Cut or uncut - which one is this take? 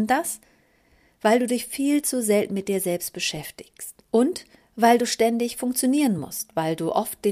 uncut